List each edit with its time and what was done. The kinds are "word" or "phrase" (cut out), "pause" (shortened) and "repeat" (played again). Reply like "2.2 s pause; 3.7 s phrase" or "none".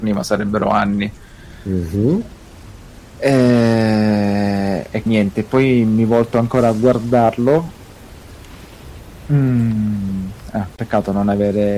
5.1 s word